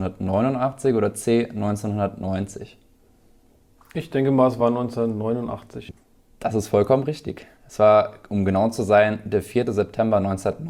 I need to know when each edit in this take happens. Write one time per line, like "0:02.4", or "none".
none